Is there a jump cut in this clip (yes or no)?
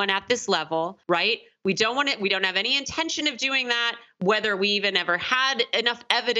yes